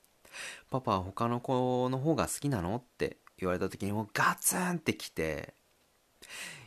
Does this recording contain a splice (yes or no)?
no